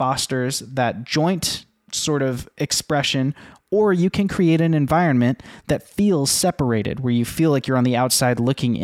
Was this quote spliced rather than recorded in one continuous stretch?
no; 0 cuts

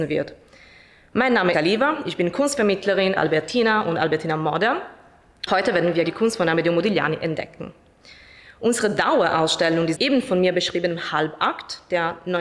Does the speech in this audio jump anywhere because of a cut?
yes; 5 cuts; at 1.5 s, 3.2 s, 5.5 s, 6.0 s, 9.9 s

